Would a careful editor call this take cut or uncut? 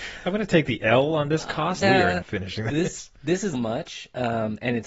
cut